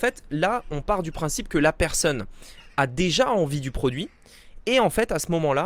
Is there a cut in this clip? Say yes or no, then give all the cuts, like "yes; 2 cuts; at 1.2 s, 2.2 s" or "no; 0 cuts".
no; 0 cuts